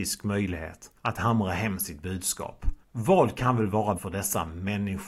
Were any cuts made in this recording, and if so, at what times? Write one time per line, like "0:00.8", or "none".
0:01.0
0:02.8
0:04.0